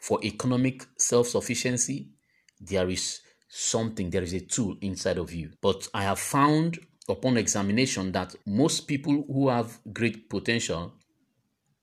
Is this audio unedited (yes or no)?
no